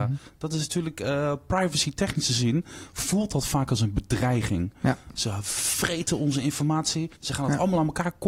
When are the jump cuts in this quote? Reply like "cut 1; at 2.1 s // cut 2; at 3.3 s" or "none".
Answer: cut 1; at 7.1 s